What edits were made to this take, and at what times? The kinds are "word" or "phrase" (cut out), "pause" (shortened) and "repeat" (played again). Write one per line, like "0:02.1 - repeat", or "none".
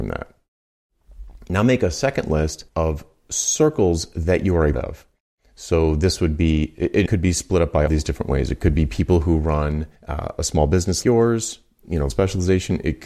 0:02.7 - pause
0:04.7 - word
0:07.1 - word
0:07.9 - word
0:10.0 - pause
0:11.0 - word
0:12.1 - word